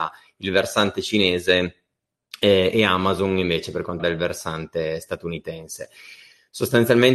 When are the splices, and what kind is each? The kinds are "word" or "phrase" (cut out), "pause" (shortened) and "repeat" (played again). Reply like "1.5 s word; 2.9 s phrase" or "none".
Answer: 4.0 s word